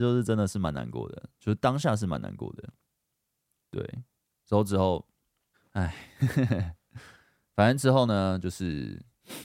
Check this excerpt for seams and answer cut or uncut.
cut